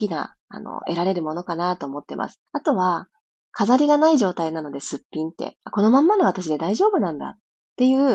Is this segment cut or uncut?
cut